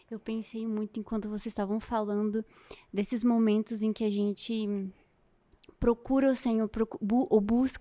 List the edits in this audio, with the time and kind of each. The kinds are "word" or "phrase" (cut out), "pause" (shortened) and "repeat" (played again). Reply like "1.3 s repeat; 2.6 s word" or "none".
none